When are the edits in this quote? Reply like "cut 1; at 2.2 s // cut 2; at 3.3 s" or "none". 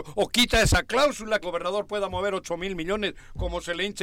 cut 1; at 1.4 s